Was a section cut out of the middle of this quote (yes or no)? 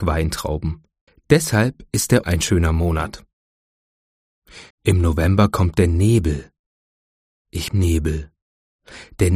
yes